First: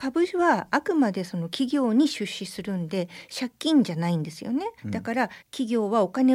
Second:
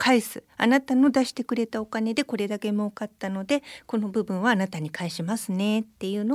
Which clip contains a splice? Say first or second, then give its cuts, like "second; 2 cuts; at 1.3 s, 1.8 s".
first; 2 cuts; at 4.8 s, 5.4 s